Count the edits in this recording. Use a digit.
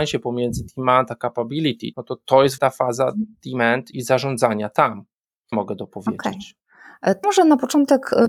5